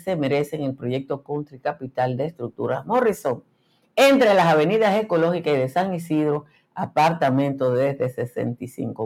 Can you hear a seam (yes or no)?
no